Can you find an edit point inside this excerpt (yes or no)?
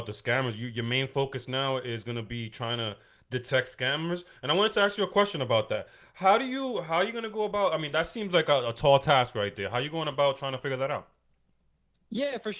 no